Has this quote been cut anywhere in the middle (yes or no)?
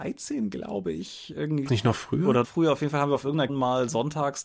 yes